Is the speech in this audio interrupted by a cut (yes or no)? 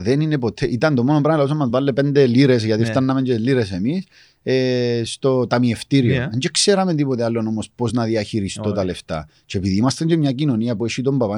no